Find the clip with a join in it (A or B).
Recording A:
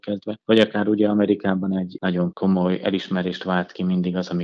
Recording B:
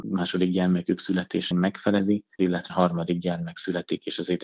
B